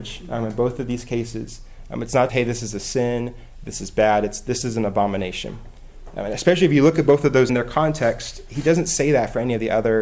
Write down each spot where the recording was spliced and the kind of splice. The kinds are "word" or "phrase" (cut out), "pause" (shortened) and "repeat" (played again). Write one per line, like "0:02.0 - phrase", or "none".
0:02.3 - word
0:07.5 - phrase
0:08.5 - word